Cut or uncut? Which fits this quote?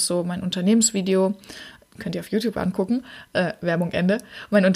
uncut